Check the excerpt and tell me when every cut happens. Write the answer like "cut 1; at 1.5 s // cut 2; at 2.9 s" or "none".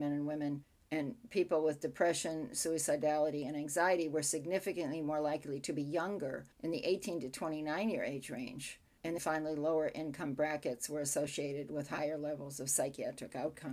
cut 1; at 6.5 s // cut 2; at 9.2 s

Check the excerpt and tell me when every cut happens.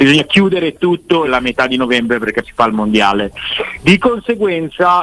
cut 1; at 1.2 s // cut 2; at 2.4 s

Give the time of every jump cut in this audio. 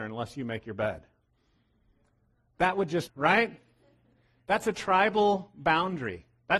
cut 1; at 3.1 s

